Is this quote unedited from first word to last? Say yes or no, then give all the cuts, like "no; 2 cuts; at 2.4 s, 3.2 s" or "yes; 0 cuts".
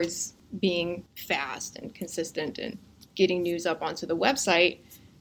yes; 0 cuts